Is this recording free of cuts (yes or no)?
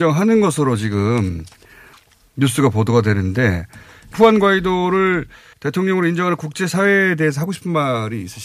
yes